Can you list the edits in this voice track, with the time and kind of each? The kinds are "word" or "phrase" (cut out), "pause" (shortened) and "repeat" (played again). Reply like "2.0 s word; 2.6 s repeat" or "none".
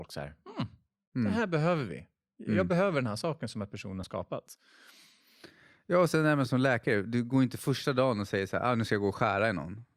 4.0 s word